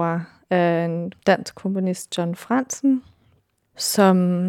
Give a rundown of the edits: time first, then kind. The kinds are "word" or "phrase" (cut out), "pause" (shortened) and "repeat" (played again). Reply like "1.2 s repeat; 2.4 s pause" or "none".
none